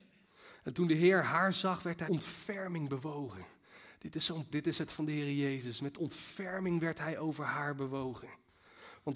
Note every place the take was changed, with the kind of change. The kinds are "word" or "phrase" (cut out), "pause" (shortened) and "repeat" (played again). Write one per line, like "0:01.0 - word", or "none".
0:02.1 - word
0:04.5 - word
0:04.9 - word